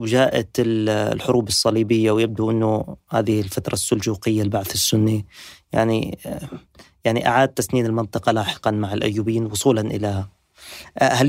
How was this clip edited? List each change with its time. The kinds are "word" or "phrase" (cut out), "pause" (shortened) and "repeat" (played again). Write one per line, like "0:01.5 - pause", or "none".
none